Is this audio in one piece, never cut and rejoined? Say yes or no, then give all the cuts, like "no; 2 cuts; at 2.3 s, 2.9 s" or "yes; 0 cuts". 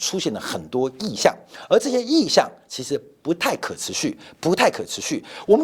yes; 0 cuts